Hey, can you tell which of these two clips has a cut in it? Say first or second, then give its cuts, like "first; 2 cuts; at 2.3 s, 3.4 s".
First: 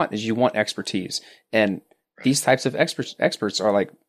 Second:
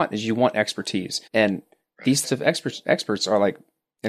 second; 2 cuts; at 1.3 s, 2.2 s